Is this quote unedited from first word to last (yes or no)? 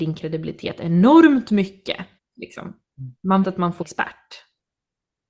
no